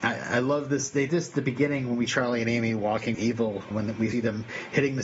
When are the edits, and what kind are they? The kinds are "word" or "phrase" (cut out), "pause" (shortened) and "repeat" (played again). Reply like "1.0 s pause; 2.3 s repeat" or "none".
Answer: 1.1 s word; 2.1 s word; 3.1 s word; 3.7 s word; 4.1 s word